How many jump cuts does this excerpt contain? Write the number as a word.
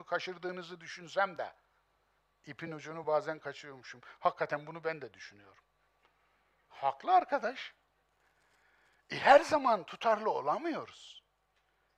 zero